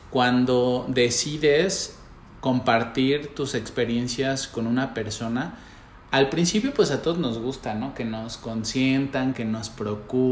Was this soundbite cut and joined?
no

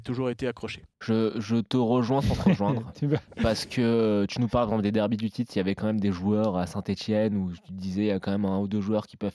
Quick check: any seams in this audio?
yes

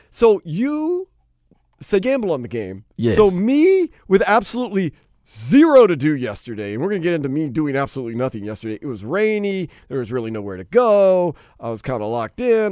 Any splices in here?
yes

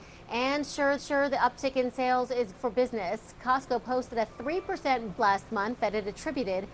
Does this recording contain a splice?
yes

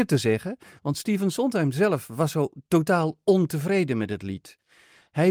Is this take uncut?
yes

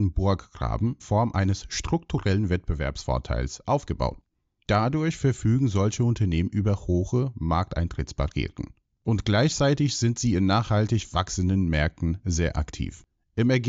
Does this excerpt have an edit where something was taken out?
yes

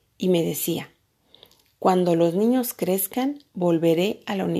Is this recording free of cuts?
yes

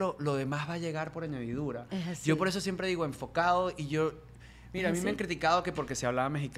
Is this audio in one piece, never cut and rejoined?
yes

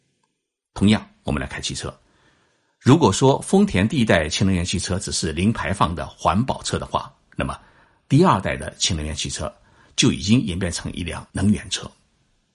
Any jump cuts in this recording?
yes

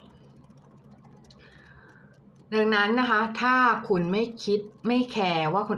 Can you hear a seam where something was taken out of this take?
yes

